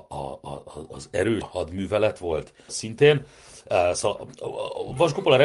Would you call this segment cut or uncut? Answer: cut